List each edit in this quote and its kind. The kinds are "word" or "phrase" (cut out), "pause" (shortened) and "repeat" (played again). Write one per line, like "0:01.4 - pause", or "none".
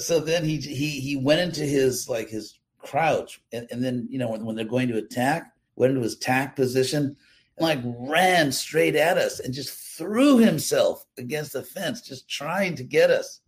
0:03.5 - pause
0:05.7 - pause
0:07.6 - word